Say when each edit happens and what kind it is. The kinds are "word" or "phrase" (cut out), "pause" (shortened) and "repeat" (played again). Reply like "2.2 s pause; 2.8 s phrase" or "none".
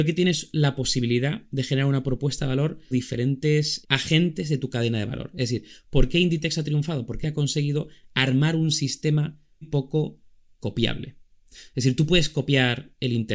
2.9 s word; 3.8 s word; 7.2 s word; 9.6 s word